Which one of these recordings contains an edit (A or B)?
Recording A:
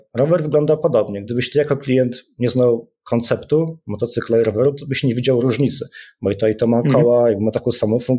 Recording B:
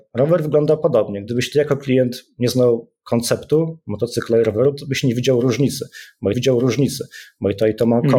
B